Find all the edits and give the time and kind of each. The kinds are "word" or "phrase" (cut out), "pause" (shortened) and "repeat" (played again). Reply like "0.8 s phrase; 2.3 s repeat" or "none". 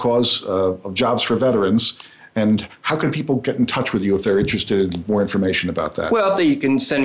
none

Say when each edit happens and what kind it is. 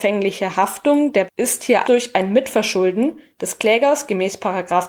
1.3 s word; 1.8 s word

